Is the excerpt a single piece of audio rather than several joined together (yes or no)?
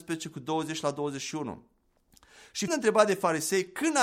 no